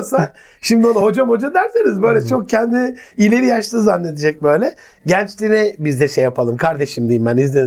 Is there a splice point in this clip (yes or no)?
no